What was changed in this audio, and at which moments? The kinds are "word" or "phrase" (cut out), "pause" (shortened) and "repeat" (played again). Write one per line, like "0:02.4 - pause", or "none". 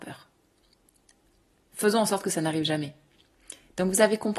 none